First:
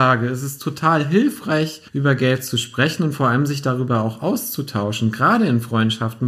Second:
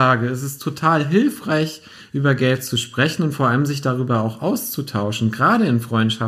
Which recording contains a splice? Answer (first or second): first